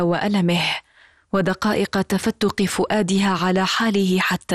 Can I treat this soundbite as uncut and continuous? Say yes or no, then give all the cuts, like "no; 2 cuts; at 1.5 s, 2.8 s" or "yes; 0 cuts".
yes; 0 cuts